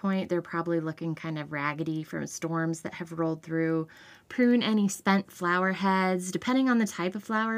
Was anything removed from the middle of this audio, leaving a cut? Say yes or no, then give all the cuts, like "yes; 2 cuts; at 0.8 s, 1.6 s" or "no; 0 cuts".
no; 0 cuts